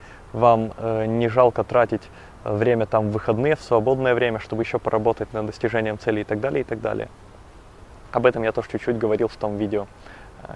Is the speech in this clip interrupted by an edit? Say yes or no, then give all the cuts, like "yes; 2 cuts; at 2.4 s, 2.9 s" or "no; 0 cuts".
no; 0 cuts